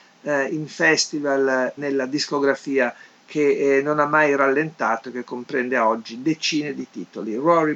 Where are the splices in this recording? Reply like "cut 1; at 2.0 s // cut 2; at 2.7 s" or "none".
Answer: cut 1; at 1.8 s